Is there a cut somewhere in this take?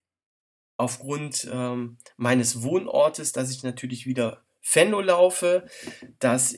no; 0 cuts

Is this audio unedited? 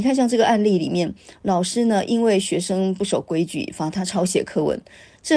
yes; 0 cuts

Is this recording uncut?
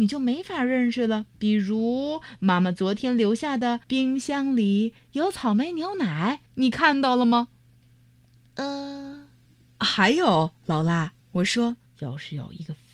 no; 6 cuts; at 1.3 s, 3.8 s, 6.5 s, 9.4 s, 11.2 s, 11.9 s

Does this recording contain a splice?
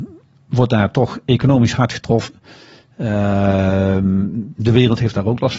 no; 0 cuts

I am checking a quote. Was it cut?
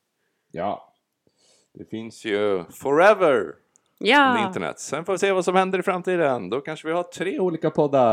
no; 0 cuts

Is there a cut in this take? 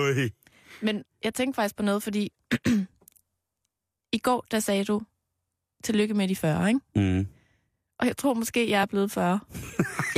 no; 0 cuts

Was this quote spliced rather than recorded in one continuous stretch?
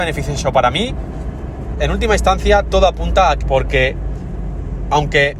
yes; 2 cuts; at 1.7 s, 3.4 s

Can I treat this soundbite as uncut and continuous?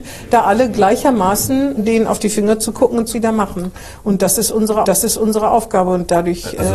no; 3 cuts; at 1.8 s, 3.1 s, 4.8 s

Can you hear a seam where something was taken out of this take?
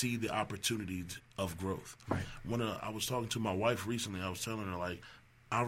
no; 0 cuts

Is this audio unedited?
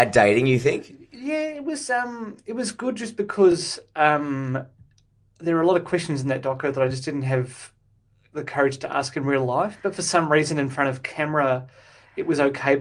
yes; 0 cuts

